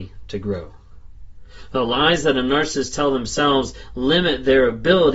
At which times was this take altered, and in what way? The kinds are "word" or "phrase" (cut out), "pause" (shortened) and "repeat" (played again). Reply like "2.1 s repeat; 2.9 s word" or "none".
none